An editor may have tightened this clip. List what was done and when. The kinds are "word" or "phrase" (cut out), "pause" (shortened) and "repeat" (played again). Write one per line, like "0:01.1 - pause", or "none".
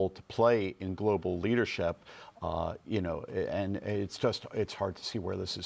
none